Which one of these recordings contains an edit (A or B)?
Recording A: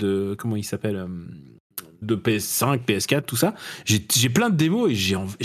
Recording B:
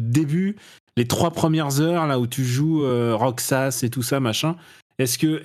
A